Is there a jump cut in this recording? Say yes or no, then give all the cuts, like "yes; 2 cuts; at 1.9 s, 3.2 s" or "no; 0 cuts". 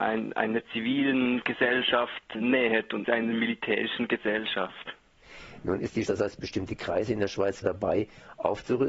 yes; 4 cuts; at 2.3 s, 3.0 s, 6.0 s, 7.6 s